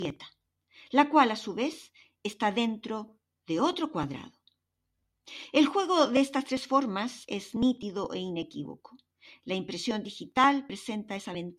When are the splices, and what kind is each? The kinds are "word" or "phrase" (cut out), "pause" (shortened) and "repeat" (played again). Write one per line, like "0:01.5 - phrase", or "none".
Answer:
none